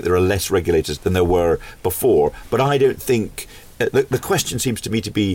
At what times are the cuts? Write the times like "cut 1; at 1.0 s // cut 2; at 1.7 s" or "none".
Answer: cut 1; at 1.0 s

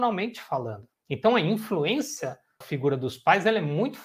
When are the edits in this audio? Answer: cut 1; at 1.0 s // cut 2; at 2.6 s

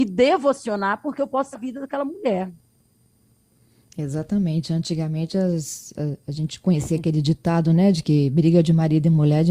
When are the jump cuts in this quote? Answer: cut 1; at 1.5 s

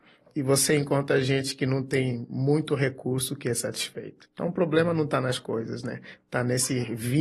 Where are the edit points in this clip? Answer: none

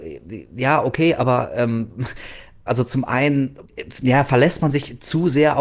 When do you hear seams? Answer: cut 1; at 2.7 s

